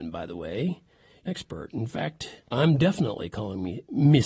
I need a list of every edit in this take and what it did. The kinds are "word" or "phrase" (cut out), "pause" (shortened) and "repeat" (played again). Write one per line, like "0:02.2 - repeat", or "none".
0:01.3 - phrase
0:02.5 - pause